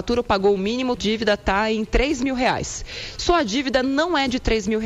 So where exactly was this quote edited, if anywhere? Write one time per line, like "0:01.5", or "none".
0:01.0